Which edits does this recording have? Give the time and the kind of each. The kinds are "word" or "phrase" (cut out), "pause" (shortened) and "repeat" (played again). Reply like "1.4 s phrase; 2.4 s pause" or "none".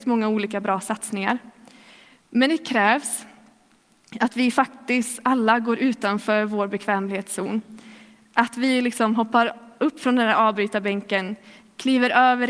none